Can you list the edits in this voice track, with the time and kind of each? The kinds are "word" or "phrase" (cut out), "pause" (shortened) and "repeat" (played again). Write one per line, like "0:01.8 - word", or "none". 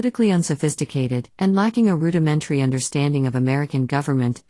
0:01.3 - pause